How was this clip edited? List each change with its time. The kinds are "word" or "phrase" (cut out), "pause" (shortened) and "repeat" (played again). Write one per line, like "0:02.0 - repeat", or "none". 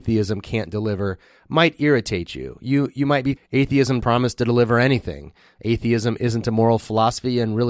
0:03.4 - word
0:04.0 - word